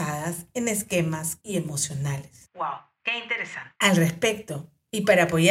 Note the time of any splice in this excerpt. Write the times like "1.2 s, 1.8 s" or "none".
1.4 s, 3.8 s